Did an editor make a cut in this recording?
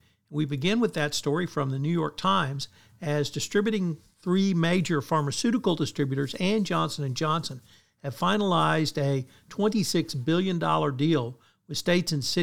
no; 0 cuts

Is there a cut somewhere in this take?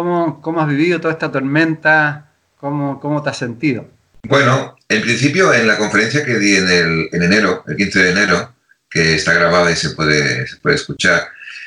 no; 0 cuts

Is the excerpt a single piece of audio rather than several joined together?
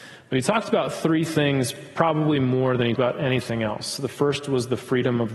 no; 1 cut; at 3.0 s

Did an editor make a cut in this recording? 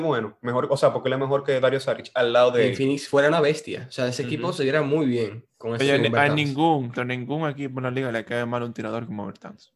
yes; 1 cut; at 6.9 s

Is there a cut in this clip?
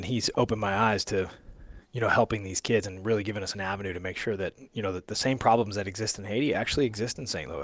no; 0 cuts

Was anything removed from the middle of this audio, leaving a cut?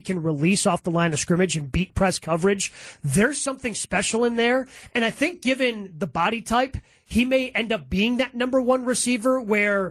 no; 0 cuts

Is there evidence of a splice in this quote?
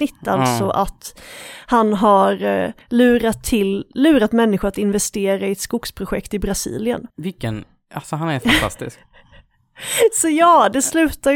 yes; 2 cuts; at 2.8 s, 7.1 s

